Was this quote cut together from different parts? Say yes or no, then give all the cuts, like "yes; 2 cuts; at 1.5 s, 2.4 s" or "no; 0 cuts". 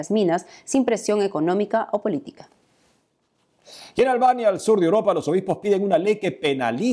no; 0 cuts